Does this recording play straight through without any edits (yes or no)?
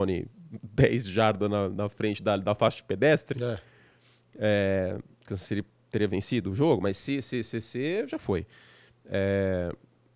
yes